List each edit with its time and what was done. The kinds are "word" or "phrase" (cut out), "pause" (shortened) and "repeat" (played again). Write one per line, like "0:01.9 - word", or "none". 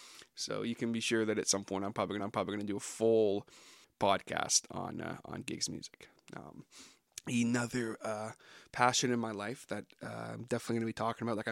0:02.2 - repeat